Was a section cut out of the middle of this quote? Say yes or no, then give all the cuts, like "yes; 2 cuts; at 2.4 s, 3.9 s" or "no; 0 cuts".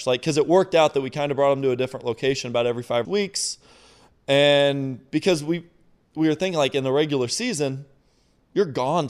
yes; 1 cut; at 3.0 s